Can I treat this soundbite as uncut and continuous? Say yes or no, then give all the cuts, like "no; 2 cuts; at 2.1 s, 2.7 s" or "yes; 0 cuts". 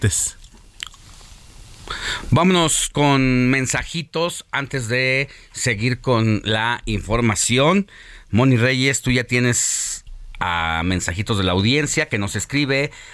yes; 0 cuts